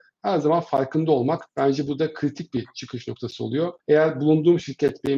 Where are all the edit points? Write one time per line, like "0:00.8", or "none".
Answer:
0:01.5
0:03.8